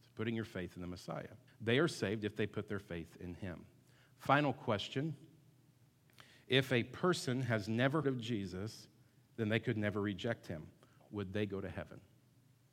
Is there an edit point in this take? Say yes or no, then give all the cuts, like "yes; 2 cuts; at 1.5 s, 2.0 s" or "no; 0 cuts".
yes; 2 cuts; at 1.5 s, 8.0 s